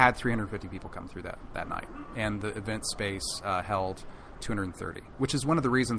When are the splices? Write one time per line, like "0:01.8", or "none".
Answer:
none